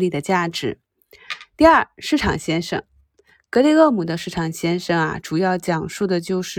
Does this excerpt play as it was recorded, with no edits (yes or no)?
yes